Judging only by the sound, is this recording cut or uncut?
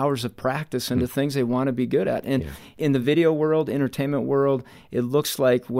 uncut